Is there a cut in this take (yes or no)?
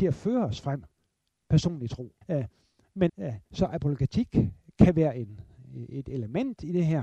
yes